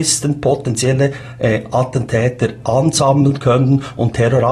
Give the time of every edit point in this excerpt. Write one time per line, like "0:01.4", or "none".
none